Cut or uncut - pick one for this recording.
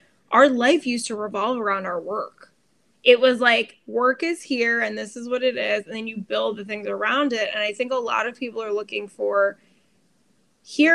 uncut